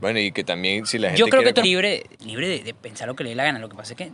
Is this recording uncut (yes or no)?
no